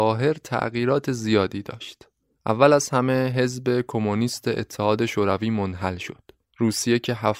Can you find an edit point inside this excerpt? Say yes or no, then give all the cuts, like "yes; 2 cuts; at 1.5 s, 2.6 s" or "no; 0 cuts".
no; 0 cuts